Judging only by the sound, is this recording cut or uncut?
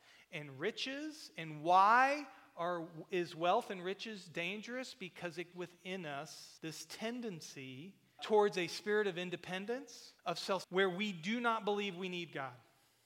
cut